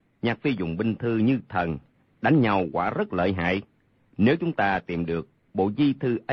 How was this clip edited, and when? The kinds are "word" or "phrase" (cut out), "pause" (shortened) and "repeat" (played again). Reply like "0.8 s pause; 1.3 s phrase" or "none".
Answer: none